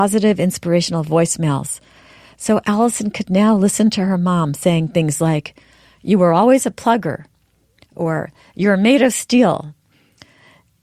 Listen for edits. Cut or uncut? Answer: uncut